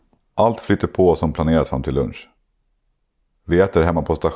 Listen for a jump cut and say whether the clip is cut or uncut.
uncut